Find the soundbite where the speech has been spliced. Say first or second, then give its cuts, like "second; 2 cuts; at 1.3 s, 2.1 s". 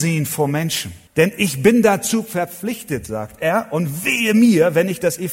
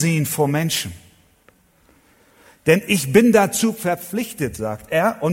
first; 1 cut; at 1.1 s